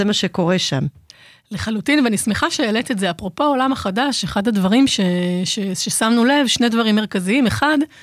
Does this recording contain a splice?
no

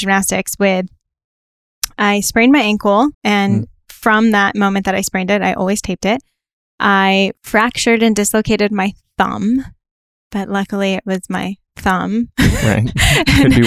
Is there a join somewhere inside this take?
yes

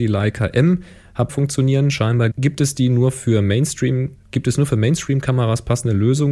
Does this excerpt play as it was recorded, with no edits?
no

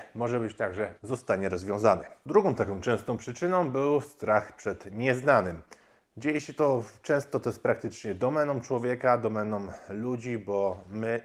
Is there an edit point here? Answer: yes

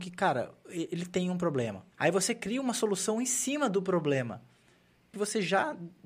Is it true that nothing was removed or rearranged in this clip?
no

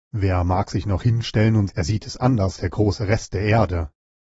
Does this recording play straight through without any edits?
no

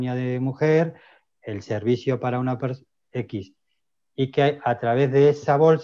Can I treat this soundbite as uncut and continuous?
yes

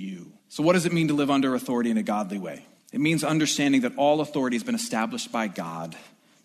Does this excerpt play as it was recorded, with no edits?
yes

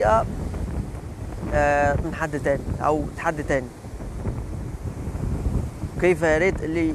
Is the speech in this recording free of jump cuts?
no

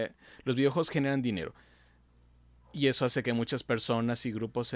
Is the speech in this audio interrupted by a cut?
no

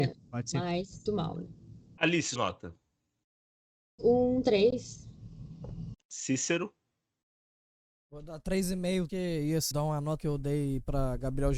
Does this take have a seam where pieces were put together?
yes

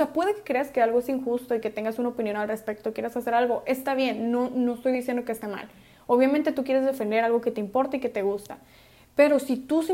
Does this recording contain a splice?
no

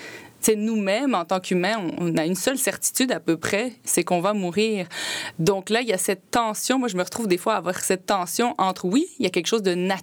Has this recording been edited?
no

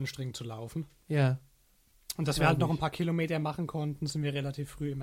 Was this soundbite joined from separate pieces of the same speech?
no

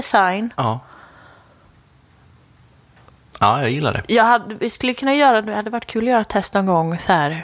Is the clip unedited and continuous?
yes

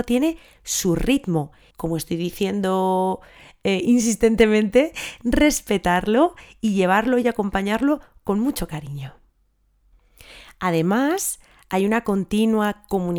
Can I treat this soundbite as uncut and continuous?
no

